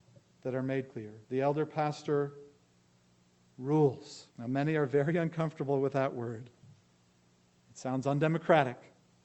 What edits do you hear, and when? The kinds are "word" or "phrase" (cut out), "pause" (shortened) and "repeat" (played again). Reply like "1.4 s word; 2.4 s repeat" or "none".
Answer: 0.9 s word; 1.2 s pause; 4.3 s pause